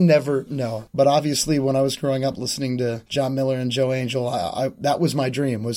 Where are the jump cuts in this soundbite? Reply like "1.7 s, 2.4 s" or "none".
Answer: none